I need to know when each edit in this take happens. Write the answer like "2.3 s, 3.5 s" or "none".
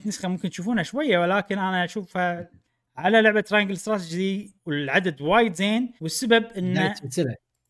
2.7 s, 4.6 s, 6.0 s